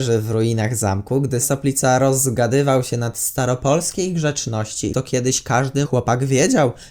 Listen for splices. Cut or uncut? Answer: cut